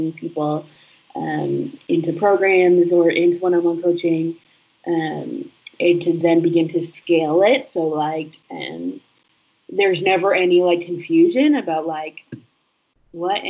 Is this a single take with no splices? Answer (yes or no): yes